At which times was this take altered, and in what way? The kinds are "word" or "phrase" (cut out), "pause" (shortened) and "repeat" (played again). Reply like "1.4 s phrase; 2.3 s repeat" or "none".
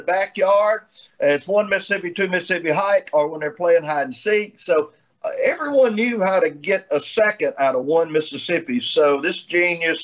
none